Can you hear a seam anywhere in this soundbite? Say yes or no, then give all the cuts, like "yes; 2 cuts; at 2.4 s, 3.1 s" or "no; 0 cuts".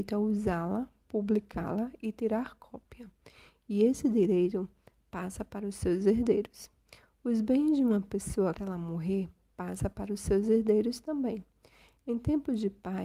yes; 1 cut; at 8.5 s